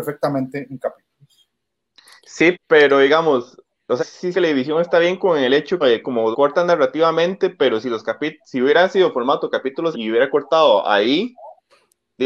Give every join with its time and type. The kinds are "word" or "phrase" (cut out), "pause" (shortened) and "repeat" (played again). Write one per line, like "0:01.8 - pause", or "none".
0:02.5 - word
0:04.0 - word
0:04.3 - word
0:05.8 - word
0:06.3 - word
0:09.9 - word

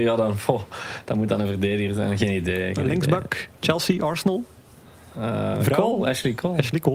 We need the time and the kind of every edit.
0:05.5 - word

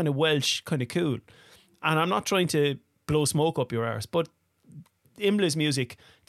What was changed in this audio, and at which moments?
0:02.9 - pause

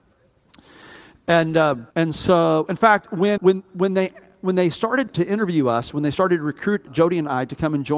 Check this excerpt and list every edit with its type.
0:01.9 - pause
0:03.4 - word
0:05.1 - word
0:06.9 - word

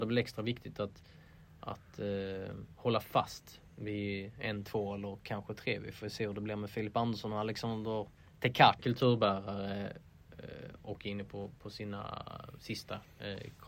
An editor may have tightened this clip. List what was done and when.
0:08.8 - phrase

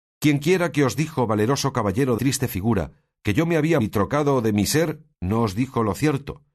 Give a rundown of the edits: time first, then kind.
0:02.2 - word
0:03.8 - word
0:05.1 - pause

